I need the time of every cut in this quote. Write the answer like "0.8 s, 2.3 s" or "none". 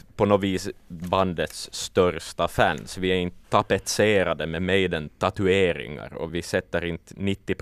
1.0 s, 3.4 s, 6.3 s